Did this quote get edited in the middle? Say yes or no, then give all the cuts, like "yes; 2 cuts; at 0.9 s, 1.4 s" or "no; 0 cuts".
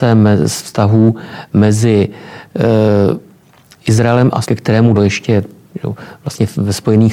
yes; 2 cuts; at 4.4 s, 4.9 s